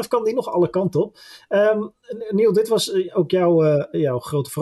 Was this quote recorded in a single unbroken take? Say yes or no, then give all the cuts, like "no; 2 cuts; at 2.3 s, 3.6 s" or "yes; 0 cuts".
yes; 0 cuts